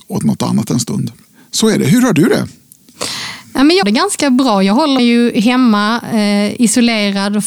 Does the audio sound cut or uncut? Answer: cut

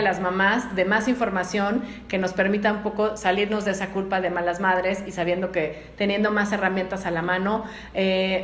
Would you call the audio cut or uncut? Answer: uncut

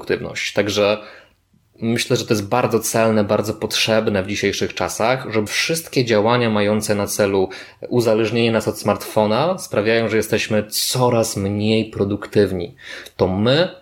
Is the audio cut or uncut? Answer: cut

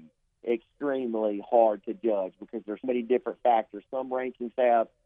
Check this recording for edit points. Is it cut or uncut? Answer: cut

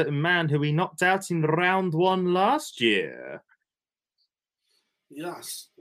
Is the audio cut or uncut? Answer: uncut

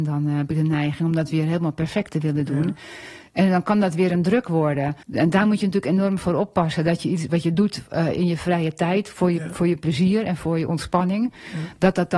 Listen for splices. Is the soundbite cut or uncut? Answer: cut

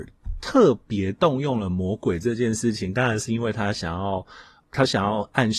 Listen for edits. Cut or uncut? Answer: cut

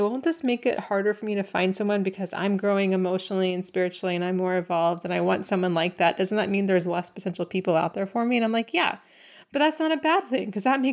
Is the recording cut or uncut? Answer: uncut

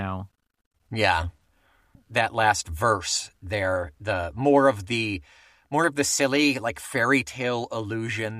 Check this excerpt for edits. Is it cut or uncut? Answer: uncut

